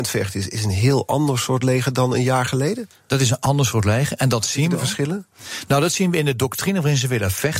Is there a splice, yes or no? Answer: no